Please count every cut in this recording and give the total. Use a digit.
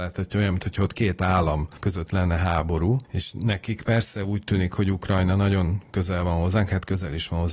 0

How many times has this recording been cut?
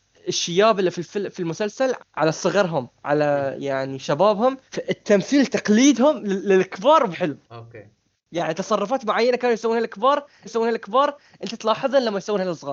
5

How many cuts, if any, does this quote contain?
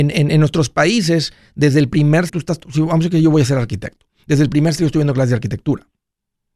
2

